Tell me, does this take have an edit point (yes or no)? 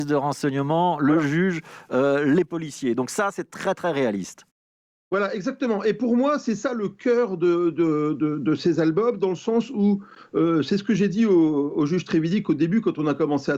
no